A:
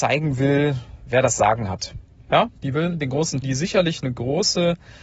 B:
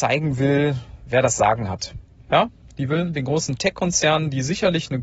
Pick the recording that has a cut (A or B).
A